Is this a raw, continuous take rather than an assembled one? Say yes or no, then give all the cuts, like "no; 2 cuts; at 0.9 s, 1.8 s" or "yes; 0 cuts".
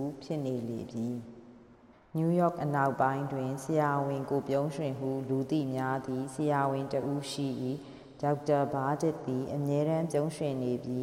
no; 1 cut; at 1.9 s